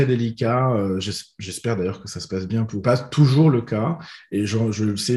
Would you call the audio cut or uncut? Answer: cut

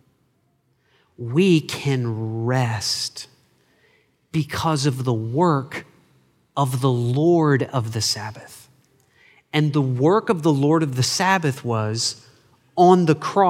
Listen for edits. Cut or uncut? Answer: uncut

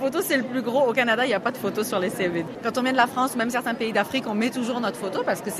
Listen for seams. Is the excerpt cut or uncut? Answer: uncut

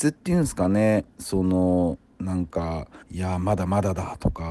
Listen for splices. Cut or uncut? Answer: cut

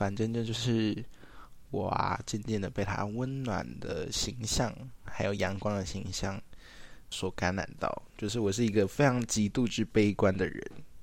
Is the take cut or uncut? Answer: cut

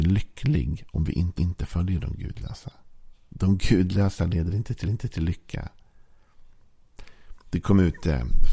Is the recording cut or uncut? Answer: cut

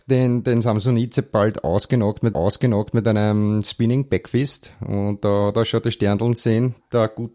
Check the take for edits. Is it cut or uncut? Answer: cut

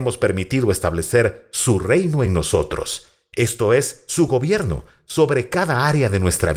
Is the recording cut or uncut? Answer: uncut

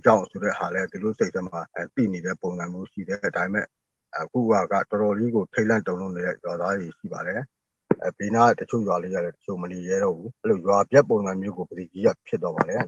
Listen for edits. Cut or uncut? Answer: cut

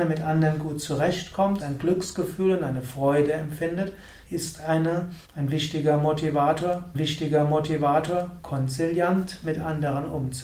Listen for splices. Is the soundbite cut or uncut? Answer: cut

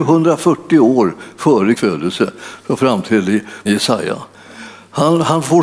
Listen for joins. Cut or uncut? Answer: cut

